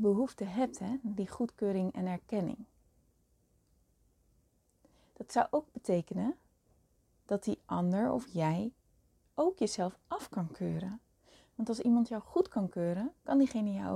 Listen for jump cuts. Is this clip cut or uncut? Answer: uncut